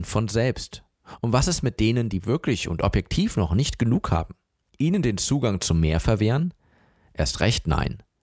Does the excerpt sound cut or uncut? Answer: uncut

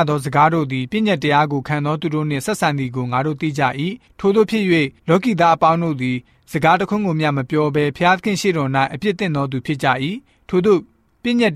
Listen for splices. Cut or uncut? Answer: uncut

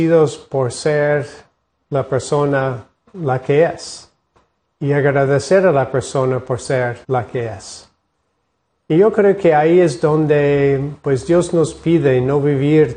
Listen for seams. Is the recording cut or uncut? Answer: cut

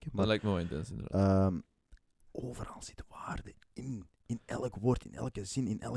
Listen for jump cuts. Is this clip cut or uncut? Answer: uncut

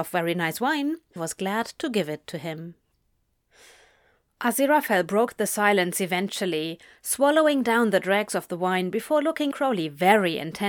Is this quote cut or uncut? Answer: cut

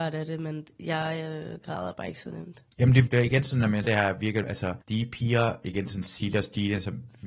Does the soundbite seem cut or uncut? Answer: cut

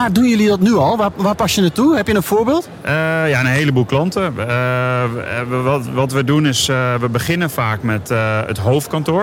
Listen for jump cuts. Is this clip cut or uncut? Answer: uncut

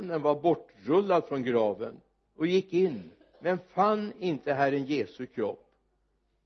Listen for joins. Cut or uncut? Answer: uncut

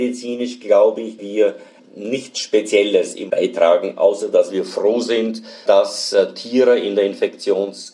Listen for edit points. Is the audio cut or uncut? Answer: cut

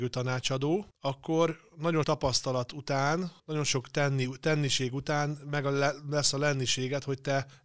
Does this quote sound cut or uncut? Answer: cut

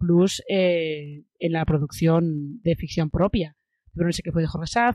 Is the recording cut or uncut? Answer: uncut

